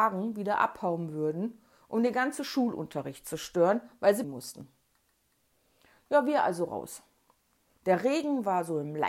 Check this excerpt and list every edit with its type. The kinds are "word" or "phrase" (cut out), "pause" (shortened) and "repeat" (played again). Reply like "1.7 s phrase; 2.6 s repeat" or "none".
4.2 s word